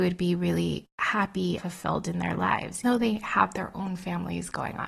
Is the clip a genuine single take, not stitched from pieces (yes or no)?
no